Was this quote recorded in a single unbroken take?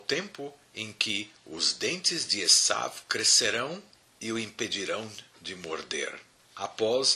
yes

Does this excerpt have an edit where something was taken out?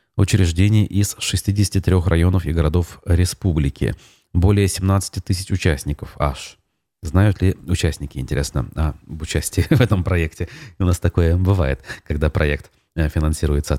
no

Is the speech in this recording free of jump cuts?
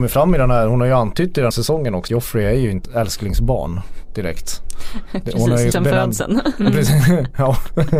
no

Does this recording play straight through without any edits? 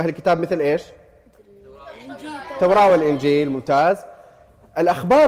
yes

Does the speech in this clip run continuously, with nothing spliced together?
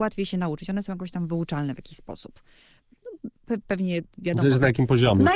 yes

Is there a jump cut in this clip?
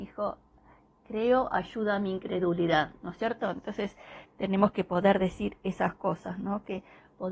no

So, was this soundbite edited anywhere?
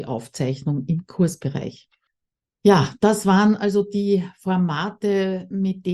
no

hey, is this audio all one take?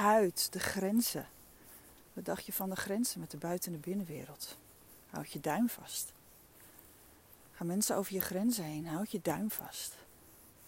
yes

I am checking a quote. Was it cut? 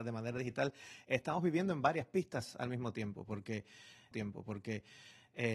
yes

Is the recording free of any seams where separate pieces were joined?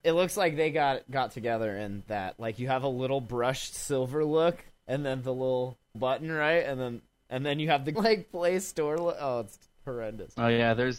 no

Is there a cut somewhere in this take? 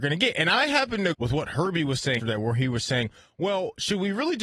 yes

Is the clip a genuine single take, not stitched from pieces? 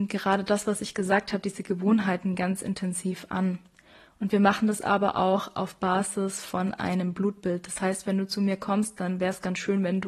yes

